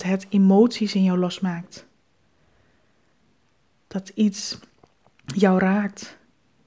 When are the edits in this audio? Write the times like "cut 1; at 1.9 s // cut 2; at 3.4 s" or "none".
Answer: none